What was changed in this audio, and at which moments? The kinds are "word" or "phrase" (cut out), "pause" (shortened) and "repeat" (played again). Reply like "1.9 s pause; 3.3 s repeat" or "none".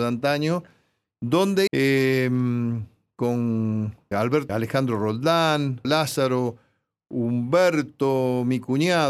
1.7 s word; 4.1 s word; 4.5 s phrase; 5.8 s word